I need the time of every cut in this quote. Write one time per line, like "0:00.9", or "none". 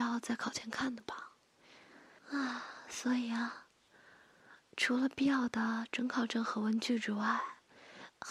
0:02.2